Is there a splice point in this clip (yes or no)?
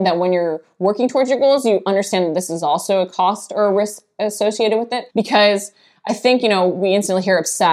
yes